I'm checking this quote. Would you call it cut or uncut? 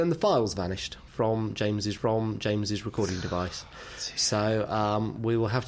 cut